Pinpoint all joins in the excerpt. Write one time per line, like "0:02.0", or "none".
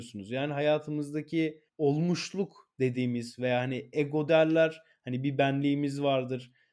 0:01.7
0:04.3